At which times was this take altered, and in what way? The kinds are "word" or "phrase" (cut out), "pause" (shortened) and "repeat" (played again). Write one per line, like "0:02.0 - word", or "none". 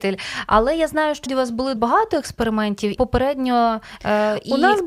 0:01.3 - word
0:01.8 - word
0:03.0 - phrase